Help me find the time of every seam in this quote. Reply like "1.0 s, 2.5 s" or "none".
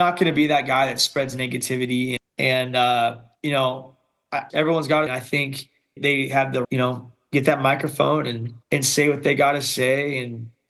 2.2 s, 3.3 s, 4.5 s, 5.1 s, 6.0 s, 6.6 s, 8.6 s

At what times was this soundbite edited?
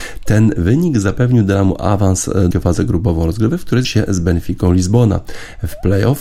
2.5 s, 3.8 s

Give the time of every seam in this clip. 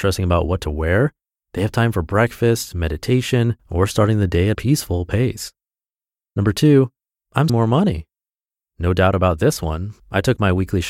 3.6 s, 4.5 s, 7.5 s

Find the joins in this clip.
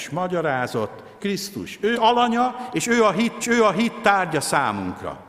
1.2 s, 1.9 s, 3.4 s

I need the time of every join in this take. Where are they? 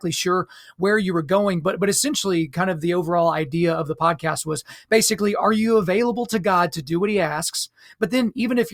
none

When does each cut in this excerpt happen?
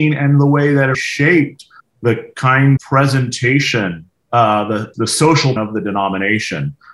0.9 s, 1.8 s, 2.8 s, 4.9 s, 5.6 s

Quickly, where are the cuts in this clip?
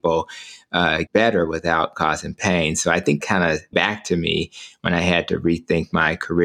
1.1 s, 3.2 s, 3.7 s

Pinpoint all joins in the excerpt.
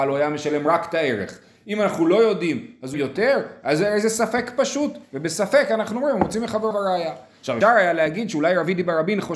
2.9 s, 6.7 s, 7.6 s

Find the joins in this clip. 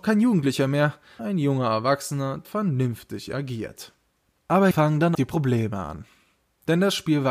1.2 s, 2.4 s, 4.7 s, 5.1 s

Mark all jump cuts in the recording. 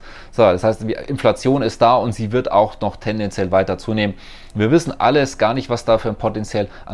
none

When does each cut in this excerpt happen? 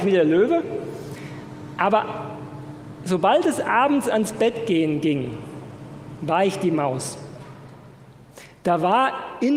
none

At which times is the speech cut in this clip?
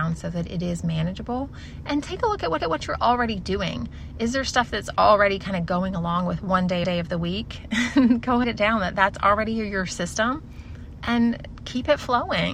2.6 s, 6.8 s, 8.4 s

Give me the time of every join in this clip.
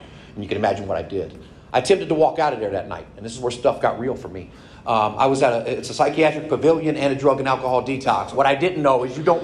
none

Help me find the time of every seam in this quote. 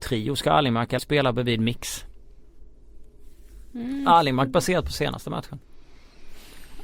1.0 s

